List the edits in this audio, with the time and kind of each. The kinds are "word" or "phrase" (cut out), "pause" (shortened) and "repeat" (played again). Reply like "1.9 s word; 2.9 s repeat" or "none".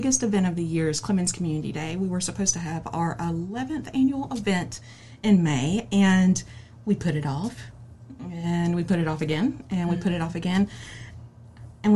none